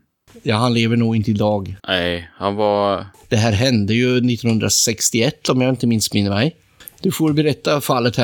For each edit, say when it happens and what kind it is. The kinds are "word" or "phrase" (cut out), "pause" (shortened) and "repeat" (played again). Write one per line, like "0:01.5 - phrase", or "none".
0:01.8 - pause